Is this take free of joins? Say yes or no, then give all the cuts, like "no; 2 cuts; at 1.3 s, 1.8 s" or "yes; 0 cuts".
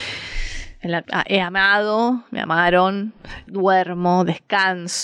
no; 2 cuts; at 1.0 s, 3.5 s